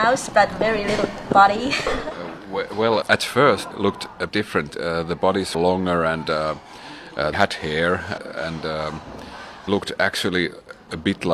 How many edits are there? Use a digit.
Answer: 7